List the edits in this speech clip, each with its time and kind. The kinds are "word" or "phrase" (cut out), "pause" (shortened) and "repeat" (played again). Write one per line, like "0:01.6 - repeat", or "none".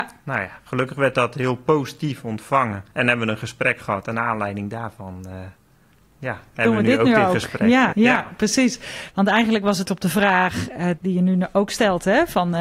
0:02.9 - word
0:07.9 - word
0:09.9 - word
0:11.0 - word